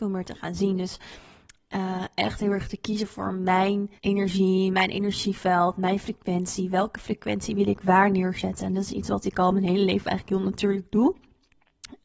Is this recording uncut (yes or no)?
no